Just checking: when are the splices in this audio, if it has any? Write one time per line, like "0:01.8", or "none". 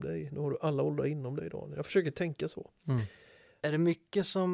none